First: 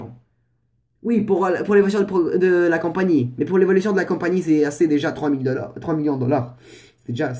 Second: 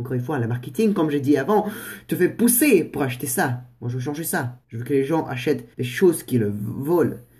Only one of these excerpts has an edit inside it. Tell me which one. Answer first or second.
second